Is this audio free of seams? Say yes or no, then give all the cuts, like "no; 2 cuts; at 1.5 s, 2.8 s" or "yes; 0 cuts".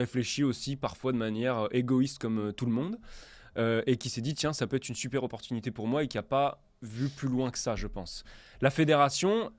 yes; 0 cuts